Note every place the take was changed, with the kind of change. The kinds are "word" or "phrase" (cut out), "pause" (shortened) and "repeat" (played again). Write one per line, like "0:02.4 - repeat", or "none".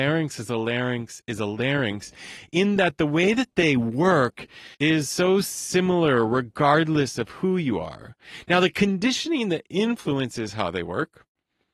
0:04.7 - pause